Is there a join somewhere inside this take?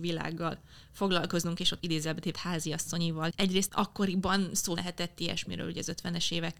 yes; 5 cuts; at 1.8 s, 2.3 s, 3.3 s, 3.7 s, 4.8 s

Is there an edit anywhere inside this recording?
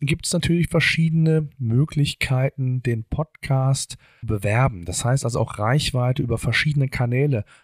yes; 1 cut; at 4.2 s

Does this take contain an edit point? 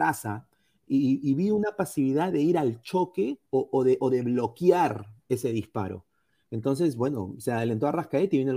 yes; 1 cut; at 3.5 s

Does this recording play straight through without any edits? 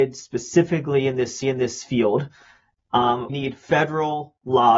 no; 2 cuts; at 1.4 s, 3.3 s

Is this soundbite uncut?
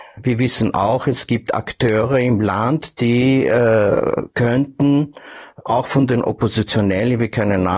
yes; 0 cuts

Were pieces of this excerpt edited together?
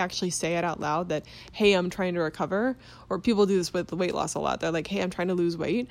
no; 0 cuts

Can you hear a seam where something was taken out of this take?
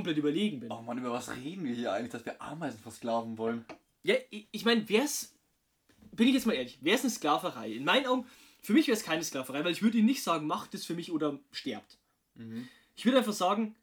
no; 0 cuts

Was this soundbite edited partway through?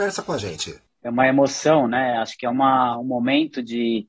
no; 0 cuts

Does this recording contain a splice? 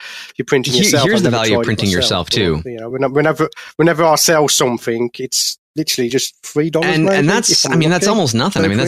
no; 0 cuts

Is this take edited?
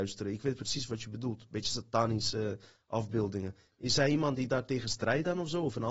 no; 0 cuts

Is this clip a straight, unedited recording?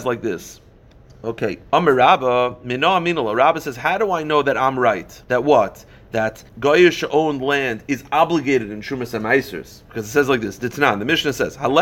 no; 4 cuts; at 1.7 s, 5.2 s, 6.5 s, 9.8 s

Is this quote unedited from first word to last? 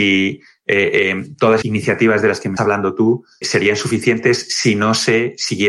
no; 3 cuts; at 1.6 s, 2.6 s, 3.4 s

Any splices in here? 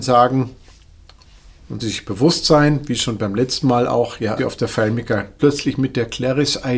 yes; 3 cuts; at 1.8 s, 4.4 s, 5.4 s

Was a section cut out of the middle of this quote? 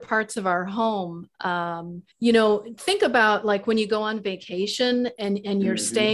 yes; 1 cut; at 2.1 s

